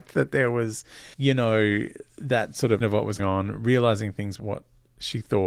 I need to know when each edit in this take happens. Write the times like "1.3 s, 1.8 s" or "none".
1.1 s, 2.1 s, 2.8 s, 3.2 s, 4.4 s